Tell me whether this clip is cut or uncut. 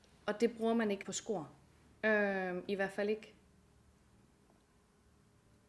cut